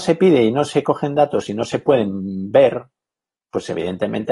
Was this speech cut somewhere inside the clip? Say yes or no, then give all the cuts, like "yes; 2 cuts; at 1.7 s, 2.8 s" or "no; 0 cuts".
no; 0 cuts